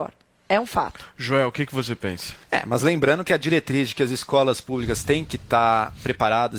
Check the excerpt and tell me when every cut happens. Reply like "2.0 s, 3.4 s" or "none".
2.4 s